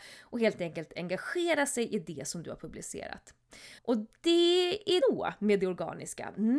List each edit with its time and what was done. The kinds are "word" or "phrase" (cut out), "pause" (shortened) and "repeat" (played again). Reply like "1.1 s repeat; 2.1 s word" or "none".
3.8 s pause; 5.0 s phrase